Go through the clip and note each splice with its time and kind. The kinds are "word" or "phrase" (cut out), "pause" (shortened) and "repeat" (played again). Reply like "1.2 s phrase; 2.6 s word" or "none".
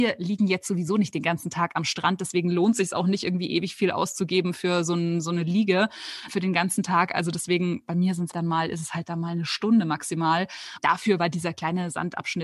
8.3 s word